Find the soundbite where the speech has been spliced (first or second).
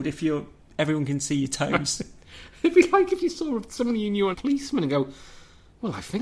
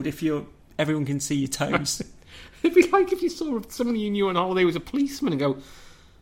first